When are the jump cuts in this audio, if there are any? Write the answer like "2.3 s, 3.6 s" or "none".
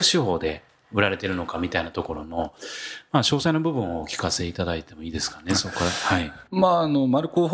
6.5 s